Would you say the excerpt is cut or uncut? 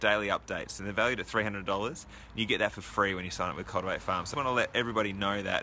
cut